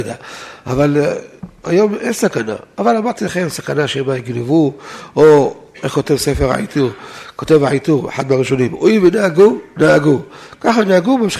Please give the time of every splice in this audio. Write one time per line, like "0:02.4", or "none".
none